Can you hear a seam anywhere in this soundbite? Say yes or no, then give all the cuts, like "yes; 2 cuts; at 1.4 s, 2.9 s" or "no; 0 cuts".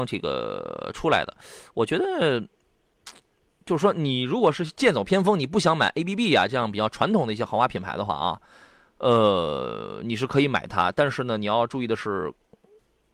no; 0 cuts